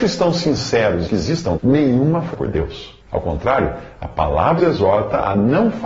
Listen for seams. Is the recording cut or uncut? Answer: cut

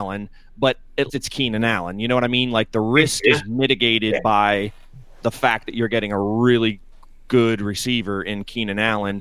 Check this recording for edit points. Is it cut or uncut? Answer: cut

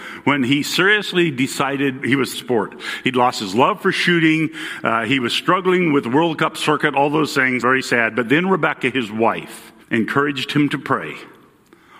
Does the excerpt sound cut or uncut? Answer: cut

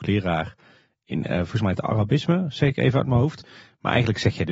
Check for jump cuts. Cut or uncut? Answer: uncut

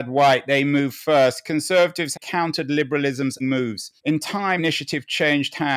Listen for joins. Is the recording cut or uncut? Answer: cut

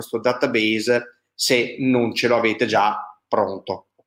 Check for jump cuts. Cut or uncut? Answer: uncut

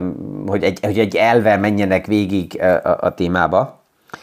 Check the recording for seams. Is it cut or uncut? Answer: uncut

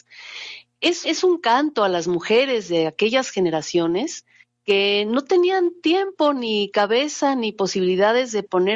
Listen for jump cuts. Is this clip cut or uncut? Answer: cut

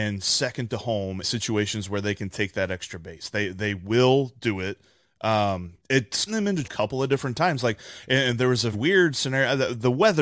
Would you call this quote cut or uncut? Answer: cut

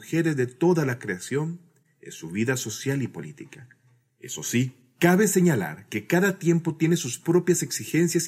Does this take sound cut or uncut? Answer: uncut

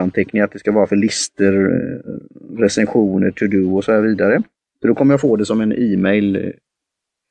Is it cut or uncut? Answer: cut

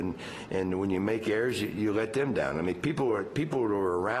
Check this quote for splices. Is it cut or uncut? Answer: uncut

